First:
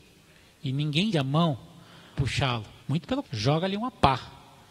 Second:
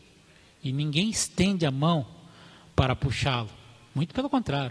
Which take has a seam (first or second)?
first